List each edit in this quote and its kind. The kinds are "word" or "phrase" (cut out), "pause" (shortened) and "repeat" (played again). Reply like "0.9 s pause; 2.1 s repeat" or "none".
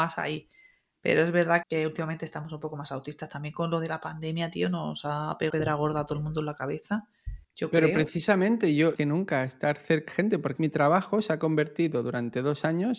1.6 s word; 5.5 s word; 7.4 s pause; 8.9 s phrase; 10.1 s word; 10.6 s word